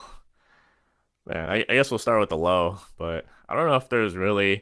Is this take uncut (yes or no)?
yes